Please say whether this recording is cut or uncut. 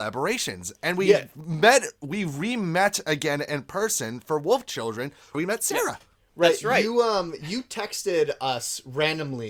cut